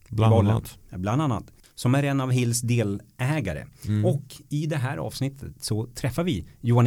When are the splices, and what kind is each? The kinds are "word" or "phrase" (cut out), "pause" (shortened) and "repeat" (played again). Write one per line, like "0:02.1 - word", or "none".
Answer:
none